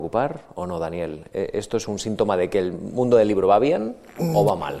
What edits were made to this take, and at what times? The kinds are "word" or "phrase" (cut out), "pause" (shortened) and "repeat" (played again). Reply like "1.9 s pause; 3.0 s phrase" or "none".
none